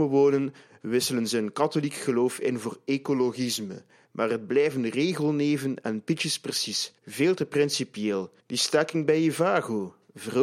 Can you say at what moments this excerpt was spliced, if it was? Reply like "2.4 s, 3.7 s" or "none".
7.0 s, 8.4 s